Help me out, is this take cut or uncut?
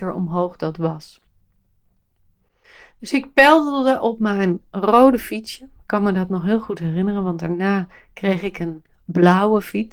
uncut